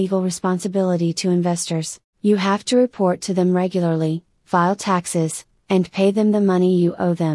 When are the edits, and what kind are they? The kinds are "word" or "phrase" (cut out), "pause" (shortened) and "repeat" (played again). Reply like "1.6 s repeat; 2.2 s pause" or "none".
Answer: 2.1 s pause